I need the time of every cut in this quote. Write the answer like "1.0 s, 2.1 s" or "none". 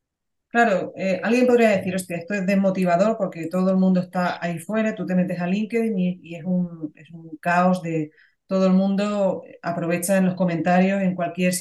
none